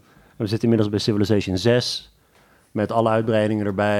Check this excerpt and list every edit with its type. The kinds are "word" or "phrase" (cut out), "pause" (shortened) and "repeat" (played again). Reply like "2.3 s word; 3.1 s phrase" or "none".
none